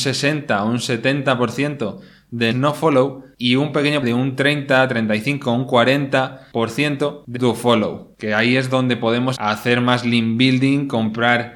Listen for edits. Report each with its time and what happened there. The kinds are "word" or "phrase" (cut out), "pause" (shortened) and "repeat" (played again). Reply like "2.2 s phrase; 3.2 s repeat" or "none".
2.5 s word; 4.0 s word; 7.3 s word; 9.3 s word

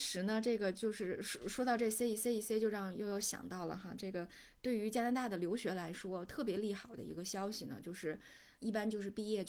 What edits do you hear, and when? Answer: 2.2 s repeat; 8.6 s word

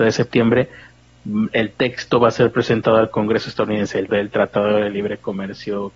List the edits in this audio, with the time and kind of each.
4.1 s word

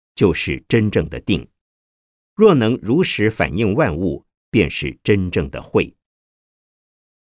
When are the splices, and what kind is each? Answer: none

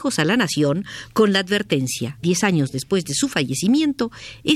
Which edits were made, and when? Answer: 2.2 s phrase

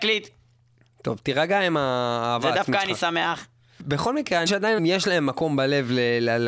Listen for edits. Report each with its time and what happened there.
4.5 s word; 4.8 s word

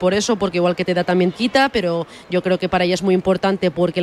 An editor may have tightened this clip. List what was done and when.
1.3 s phrase

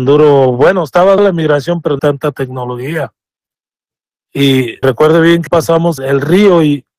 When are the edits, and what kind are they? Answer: 1.2 s word; 2.0 s word; 4.8 s word; 5.5 s word; 6.0 s word

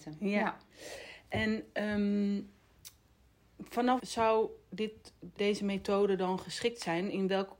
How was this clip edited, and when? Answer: 4.0 s word; 5.4 s word

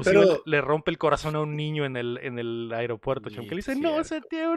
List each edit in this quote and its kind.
none

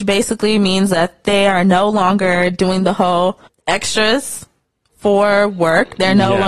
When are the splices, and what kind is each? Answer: 3.5 s pause

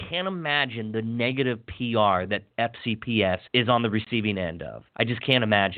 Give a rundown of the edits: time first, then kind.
3.5 s pause; 4.9 s pause

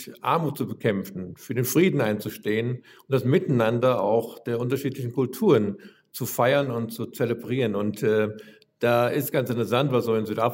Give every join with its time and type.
none

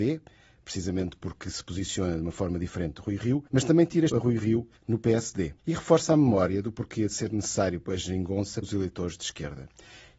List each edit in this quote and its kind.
3.5 s pause; 4.1 s word; 4.8 s pause; 5.6 s pause; 8.6 s word

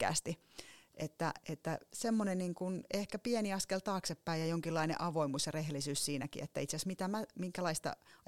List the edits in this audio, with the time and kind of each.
none

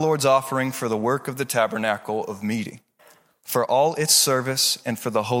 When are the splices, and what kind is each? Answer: 3.0 s pause

